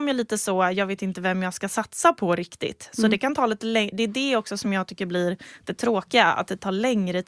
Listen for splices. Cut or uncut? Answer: uncut